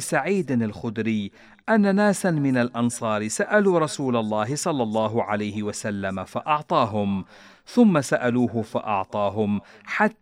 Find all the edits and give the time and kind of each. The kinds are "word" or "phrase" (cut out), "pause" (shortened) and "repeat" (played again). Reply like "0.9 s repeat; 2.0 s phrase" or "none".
none